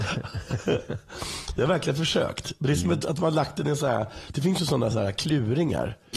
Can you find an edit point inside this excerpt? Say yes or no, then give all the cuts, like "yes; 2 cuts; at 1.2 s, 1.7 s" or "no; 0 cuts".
no; 0 cuts